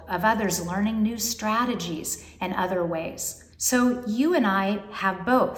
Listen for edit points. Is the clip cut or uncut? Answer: cut